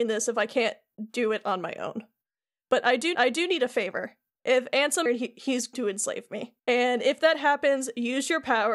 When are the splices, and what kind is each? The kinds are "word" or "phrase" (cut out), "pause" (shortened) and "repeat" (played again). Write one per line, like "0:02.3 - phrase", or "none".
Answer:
0:03.1 - repeat
0:05.1 - phrase
0:05.7 - word
0:06.6 - pause

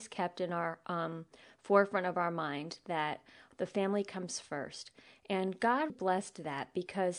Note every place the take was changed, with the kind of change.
0:05.9 - word

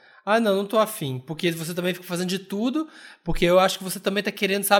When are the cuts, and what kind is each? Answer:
none

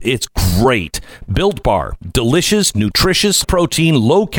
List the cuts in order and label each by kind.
0:03.4 - word

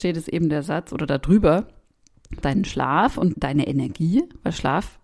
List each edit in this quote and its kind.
0:02.4 - word
0:03.3 - word

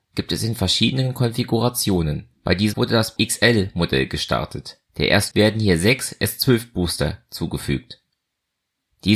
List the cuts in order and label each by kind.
0:02.4 - pause
0:02.7 - word
0:03.2 - word
0:04.9 - pause
0:05.3 - word

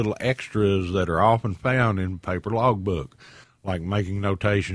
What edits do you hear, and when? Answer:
none

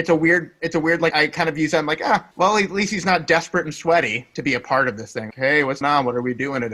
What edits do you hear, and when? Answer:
0:01.1 - word
0:02.3 - pause
0:05.3 - word
0:05.8 - word

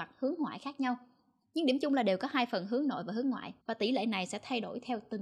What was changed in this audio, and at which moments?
0:03.6 - pause

